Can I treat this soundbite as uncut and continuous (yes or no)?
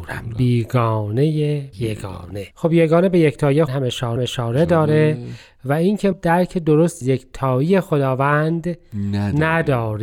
no